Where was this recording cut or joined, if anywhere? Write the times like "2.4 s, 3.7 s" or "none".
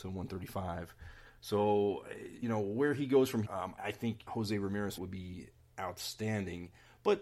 2.4 s, 3.4 s, 3.8 s, 4.3 s, 5.0 s